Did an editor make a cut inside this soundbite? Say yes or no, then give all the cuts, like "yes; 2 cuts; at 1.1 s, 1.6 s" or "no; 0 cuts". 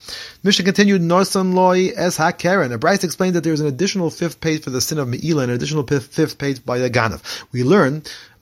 no; 0 cuts